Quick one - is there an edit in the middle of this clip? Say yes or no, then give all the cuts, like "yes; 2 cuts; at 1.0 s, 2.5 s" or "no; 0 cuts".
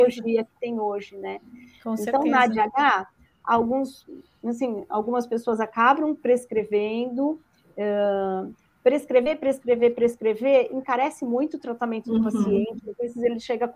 no; 0 cuts